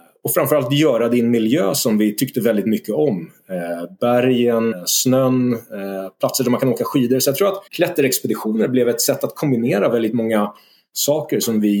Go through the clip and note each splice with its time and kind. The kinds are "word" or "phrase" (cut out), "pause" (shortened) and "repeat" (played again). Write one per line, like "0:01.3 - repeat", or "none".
0:04.7 - word
0:07.7 - pause